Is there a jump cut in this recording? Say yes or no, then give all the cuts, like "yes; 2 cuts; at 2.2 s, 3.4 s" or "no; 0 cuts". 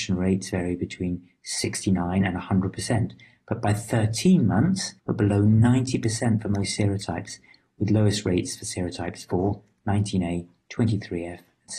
yes; 1 cut; at 5.0 s